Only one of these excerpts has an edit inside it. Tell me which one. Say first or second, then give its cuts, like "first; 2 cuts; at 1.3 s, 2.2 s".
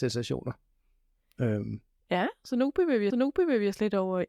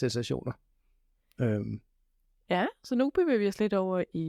first; 2 cuts; at 2.0 s, 3.1 s